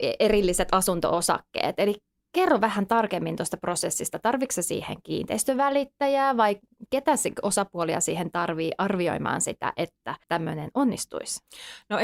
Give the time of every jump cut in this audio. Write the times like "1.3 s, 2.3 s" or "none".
10.2 s